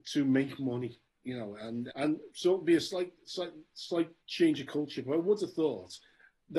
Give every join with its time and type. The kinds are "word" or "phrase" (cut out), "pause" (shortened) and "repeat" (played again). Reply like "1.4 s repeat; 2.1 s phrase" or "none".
1.9 s word